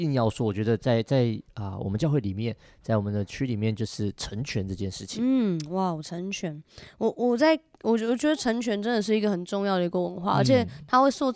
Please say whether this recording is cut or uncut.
uncut